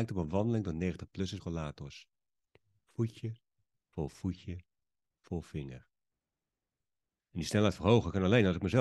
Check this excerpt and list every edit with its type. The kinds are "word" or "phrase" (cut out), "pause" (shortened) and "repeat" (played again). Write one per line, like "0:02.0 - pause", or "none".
0:01.4 - word
0:05.0 - word